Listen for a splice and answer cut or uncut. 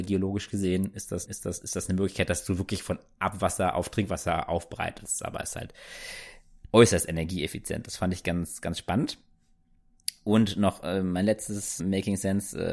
cut